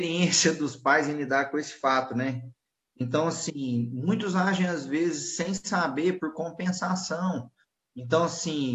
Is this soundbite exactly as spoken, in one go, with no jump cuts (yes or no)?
yes